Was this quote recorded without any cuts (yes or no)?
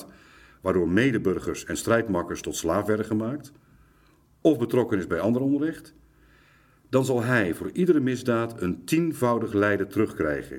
yes